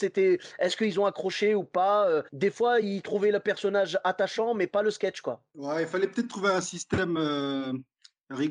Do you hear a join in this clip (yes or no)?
no